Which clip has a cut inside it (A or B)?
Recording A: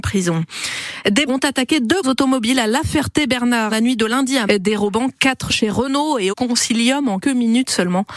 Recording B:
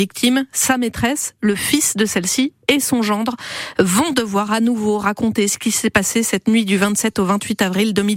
A